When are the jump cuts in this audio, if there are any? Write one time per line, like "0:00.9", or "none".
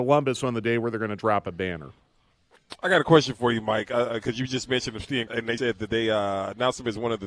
0:05.3
0:05.6